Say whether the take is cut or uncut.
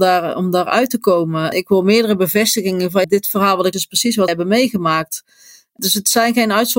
cut